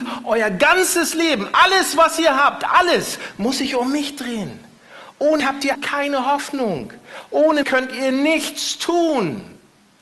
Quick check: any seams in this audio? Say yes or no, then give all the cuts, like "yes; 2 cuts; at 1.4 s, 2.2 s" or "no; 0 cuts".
yes; 3 cuts; at 5.4 s, 5.7 s, 7.6 s